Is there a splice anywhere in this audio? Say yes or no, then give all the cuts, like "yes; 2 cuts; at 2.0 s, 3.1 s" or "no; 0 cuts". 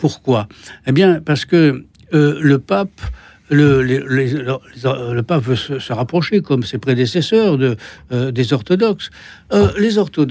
no; 0 cuts